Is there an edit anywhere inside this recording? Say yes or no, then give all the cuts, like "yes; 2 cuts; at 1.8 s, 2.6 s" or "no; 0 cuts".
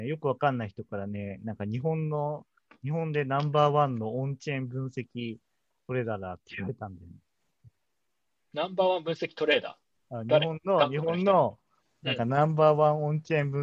no; 0 cuts